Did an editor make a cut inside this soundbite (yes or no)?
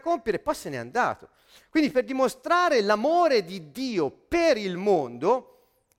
no